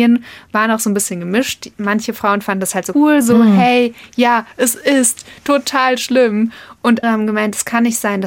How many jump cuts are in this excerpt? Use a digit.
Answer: 2